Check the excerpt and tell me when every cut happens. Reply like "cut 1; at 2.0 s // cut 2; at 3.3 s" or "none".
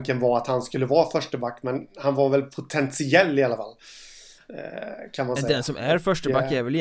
none